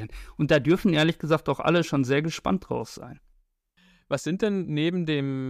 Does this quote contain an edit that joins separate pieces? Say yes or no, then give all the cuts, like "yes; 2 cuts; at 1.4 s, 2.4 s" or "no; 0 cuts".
no; 0 cuts